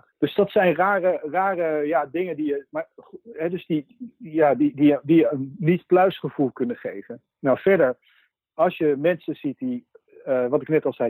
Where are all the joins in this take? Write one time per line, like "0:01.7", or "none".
none